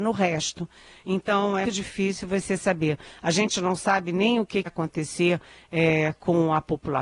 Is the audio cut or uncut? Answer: cut